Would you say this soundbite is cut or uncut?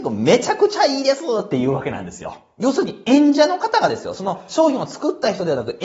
uncut